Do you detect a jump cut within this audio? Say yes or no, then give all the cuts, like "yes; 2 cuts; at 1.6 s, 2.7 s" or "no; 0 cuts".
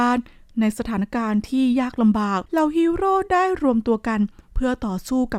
yes; 1 cut; at 2.5 s